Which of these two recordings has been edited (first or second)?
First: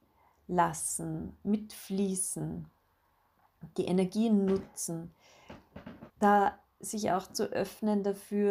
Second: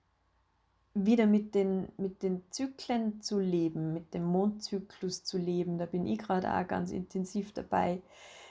first